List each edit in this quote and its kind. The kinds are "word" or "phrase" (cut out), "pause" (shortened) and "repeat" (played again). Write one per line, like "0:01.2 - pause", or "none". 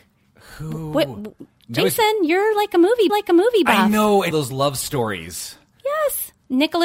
0:01.6 - pause
0:03.1 - repeat
0:04.3 - phrase

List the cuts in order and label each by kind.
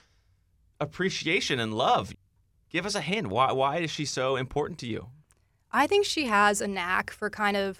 none

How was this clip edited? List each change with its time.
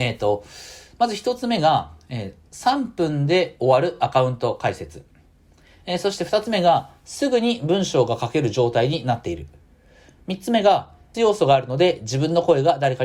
0:11.1 - word

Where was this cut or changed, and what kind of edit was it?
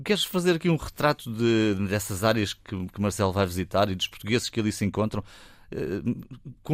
none

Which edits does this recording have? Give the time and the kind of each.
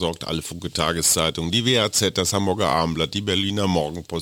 none

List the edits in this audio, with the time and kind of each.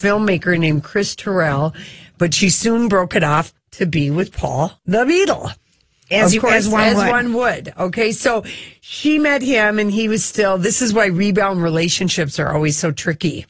0:03.6 - pause
0:04.8 - pause

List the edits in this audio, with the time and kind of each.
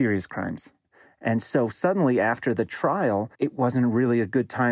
0:03.3 - pause

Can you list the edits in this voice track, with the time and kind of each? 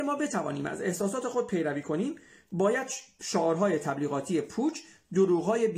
none

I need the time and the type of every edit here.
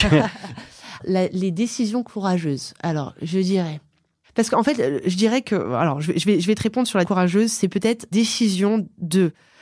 0:01.0 - word
0:07.0 - word
0:08.1 - word

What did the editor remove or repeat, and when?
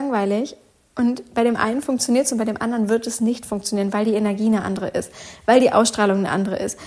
none

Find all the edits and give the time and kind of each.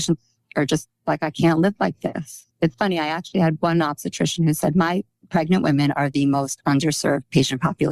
0:02.5 - pause

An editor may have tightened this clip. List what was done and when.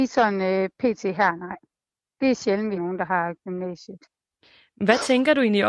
0:02.8 - word

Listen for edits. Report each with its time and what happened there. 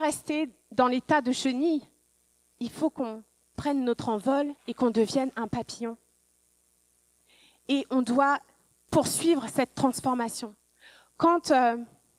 0:04.6 - pause

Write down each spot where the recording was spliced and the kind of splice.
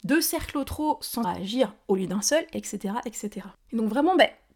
0:01.2 - word
0:03.5 - pause

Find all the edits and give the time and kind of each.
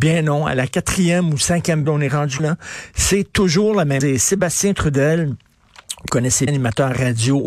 0:01.9 - word
0:02.4 - word
0:04.0 - word
0:06.1 - word
0:06.5 - word

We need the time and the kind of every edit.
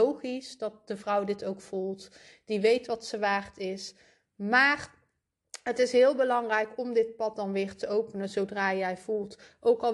none

